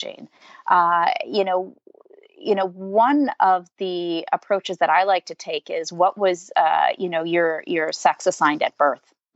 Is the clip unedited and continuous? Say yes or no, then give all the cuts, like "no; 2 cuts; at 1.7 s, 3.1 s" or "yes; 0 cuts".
yes; 0 cuts